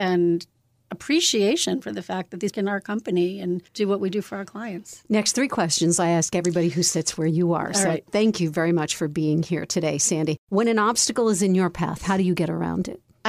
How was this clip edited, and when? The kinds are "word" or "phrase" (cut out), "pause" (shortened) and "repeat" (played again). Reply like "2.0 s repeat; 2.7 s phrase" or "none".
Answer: 2.5 s phrase; 3.7 s pause; 10.4 s pause